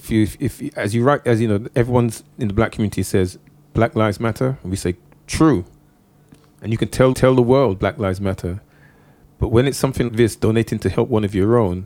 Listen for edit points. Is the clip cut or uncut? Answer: cut